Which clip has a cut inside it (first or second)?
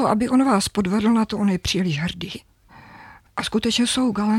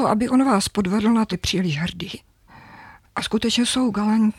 second